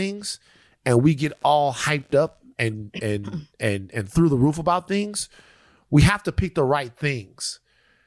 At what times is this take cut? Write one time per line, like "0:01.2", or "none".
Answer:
none